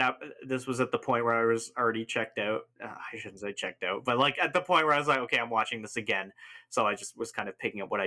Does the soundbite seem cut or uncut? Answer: uncut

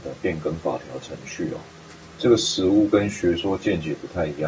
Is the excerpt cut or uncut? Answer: cut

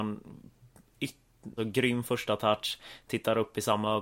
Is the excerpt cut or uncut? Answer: cut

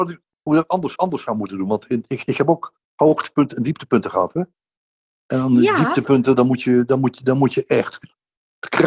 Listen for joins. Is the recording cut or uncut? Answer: cut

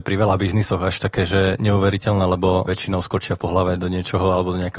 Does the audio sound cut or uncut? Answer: cut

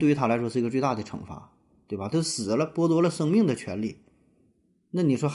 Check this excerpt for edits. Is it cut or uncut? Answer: uncut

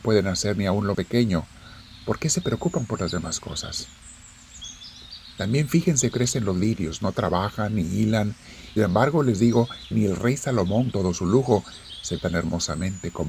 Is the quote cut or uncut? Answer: cut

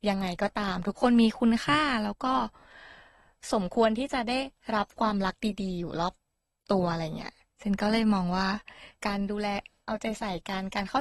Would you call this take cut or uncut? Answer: uncut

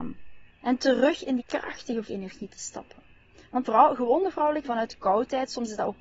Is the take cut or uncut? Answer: cut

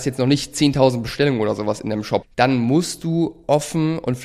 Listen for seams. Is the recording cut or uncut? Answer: cut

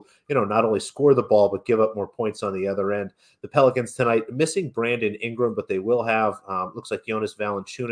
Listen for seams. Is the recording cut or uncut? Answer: uncut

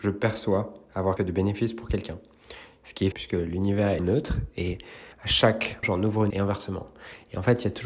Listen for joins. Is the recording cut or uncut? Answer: cut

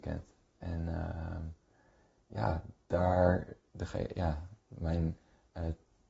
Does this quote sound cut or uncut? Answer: uncut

